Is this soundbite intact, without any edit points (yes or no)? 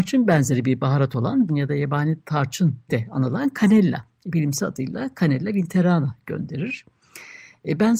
no